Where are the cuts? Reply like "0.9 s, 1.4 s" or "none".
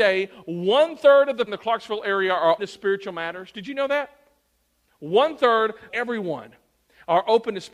1.5 s, 2.6 s, 5.9 s

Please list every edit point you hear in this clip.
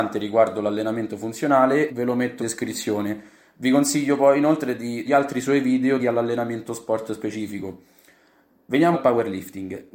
1.9 s, 2.4 s, 5.1 s, 6.0 s, 8.9 s

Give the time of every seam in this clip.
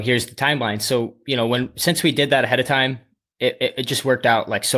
none

